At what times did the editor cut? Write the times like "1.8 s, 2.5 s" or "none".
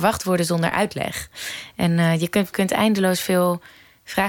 2.5 s